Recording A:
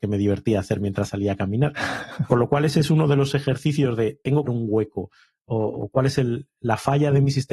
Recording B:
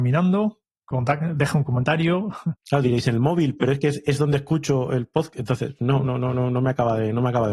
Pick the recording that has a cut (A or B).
A